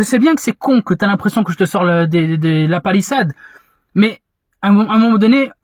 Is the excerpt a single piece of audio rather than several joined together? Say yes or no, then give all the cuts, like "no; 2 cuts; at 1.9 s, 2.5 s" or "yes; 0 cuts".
yes; 0 cuts